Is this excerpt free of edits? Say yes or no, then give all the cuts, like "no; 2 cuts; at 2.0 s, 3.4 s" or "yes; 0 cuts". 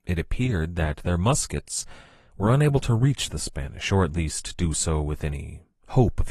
yes; 0 cuts